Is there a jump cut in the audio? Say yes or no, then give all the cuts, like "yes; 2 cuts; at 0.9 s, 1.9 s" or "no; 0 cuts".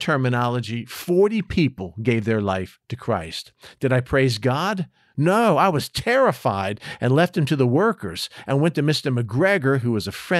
no; 0 cuts